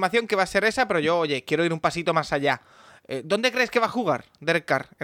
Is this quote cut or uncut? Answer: uncut